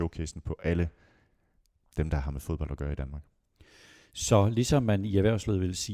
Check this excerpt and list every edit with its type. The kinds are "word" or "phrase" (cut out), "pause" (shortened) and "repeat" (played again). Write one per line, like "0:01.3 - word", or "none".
none